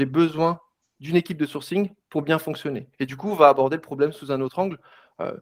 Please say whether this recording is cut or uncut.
cut